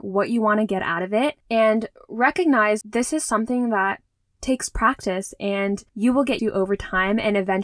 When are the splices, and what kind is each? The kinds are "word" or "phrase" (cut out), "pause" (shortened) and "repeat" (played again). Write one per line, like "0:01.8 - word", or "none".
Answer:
0:01.4 - pause
0:02.8 - word
0:05.9 - pause
0:06.4 - word